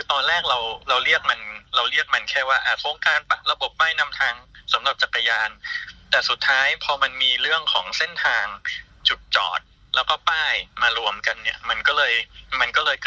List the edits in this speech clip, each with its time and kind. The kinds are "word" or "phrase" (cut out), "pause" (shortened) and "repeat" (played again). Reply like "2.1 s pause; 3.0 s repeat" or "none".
none

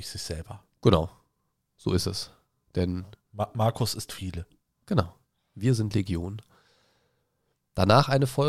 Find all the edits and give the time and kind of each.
none

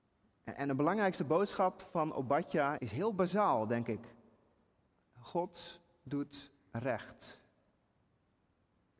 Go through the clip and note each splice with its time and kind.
2.8 s word; 6.6 s pause

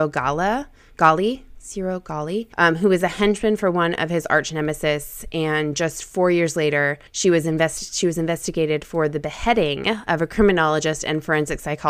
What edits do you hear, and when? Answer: 2.5 s pause; 7.1 s pause

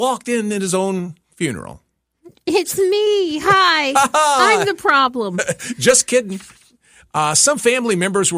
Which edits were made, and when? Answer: none

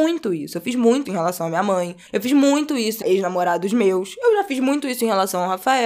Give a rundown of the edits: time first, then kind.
1.1 s word; 2.1 s pause; 3.0 s phrase

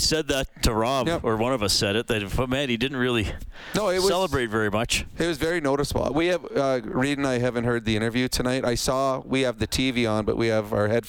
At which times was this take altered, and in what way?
none

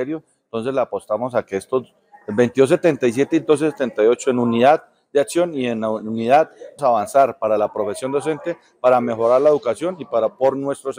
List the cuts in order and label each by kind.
6.8 s phrase

